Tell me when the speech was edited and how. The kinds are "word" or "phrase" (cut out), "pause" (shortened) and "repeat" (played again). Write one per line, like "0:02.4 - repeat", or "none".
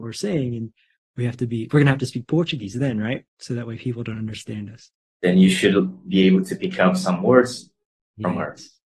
none